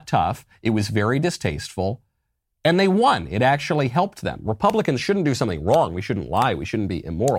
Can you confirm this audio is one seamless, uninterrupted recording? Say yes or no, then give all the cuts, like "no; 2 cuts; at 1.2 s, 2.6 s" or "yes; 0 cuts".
yes; 0 cuts